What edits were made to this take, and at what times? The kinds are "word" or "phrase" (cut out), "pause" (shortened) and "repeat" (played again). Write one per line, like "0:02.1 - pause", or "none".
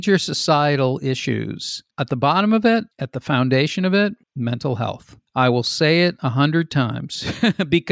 0:01.9 - pause
0:02.9 - pause
0:04.2 - pause
0:05.3 - pause